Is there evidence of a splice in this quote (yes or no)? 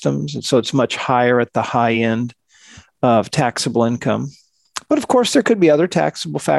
no